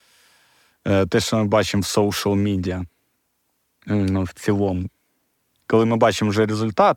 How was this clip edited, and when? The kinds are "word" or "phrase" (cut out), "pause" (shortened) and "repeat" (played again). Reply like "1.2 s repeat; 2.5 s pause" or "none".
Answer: none